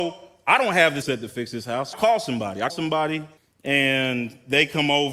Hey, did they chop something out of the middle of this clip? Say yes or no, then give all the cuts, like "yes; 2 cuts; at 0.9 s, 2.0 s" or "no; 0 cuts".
yes; 4 cuts; at 1.0 s, 1.9 s, 2.7 s, 3.4 s